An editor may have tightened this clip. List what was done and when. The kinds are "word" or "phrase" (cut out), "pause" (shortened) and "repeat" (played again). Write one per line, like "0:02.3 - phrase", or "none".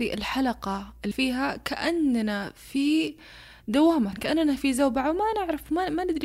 0:01.1 - word
0:04.1 - word